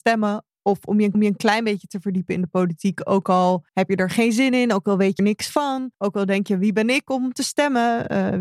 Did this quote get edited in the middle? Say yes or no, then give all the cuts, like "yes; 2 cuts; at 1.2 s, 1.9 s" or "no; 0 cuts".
yes; 4 cuts; at 1.1 s, 3.7 s, 5.2 s, 5.9 s